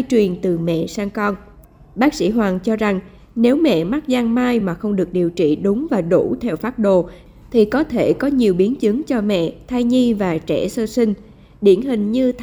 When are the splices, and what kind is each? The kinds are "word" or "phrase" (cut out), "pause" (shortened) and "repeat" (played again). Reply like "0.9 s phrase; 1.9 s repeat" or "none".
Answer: none